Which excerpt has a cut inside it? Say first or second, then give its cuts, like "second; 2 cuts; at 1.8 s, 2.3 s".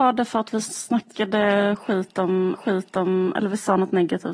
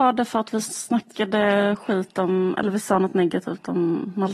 first; 1 cut; at 2.6 s